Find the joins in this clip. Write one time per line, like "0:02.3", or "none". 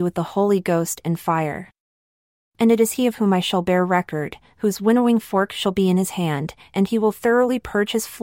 none